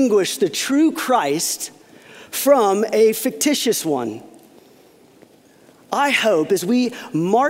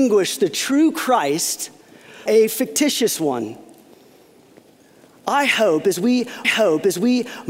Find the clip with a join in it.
second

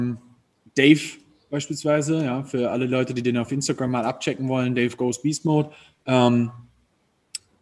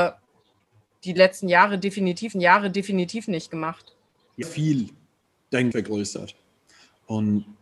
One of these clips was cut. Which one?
second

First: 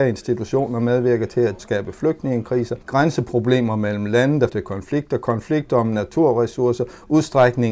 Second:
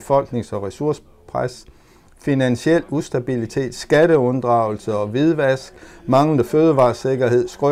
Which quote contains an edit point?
first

